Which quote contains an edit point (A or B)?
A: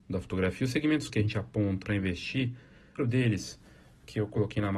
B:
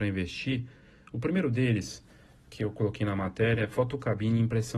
A